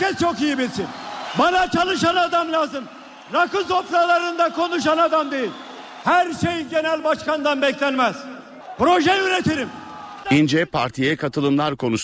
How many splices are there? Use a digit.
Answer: 0